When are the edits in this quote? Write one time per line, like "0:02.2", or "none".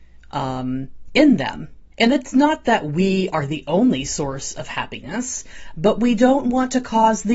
0:01.9